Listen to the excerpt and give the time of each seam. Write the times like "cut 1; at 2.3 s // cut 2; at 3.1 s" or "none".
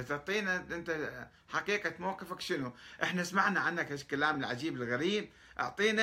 none